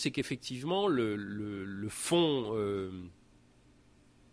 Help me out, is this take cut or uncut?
uncut